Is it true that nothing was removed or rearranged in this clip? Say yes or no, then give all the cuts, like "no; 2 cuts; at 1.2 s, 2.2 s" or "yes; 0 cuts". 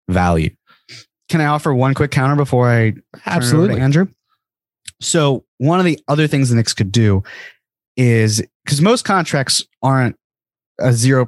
yes; 0 cuts